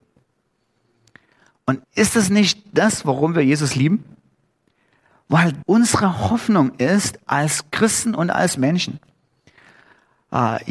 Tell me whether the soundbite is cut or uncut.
cut